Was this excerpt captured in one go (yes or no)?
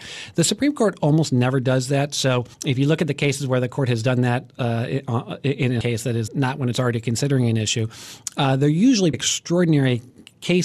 no